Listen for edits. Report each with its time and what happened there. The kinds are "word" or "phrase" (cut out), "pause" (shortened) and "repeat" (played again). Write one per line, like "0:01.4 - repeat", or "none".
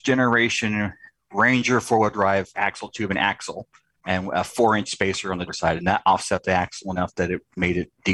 0:02.5 - word
0:05.5 - word